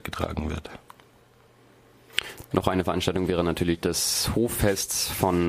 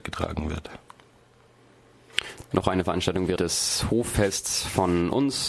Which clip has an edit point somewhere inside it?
second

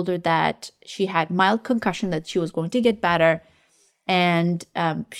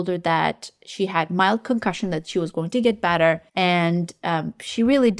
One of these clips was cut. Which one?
second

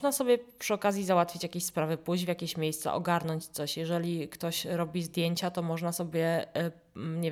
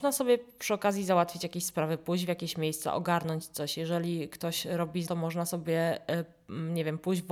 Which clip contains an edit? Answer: second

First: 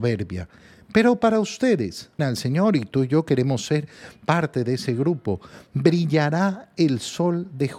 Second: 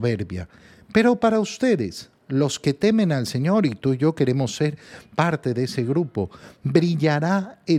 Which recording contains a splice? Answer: first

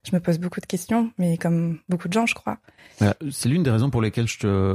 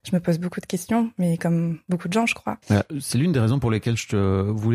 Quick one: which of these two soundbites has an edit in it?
second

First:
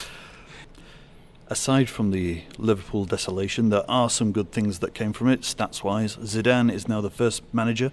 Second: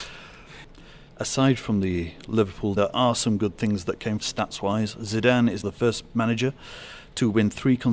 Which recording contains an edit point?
second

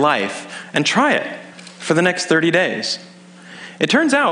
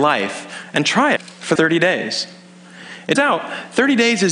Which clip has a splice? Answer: second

